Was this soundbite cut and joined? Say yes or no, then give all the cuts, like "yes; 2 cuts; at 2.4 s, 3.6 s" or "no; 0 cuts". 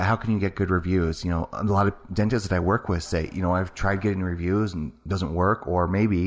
no; 0 cuts